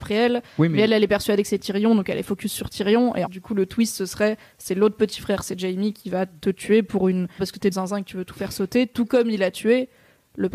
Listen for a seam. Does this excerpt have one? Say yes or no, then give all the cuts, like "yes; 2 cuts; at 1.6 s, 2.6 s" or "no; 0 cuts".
yes; 3 cuts; at 3.3 s, 7.4 s, 7.7 s